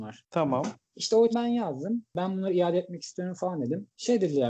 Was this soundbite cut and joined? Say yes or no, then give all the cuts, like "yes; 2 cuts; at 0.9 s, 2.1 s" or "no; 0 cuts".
yes; 1 cut; at 1.3 s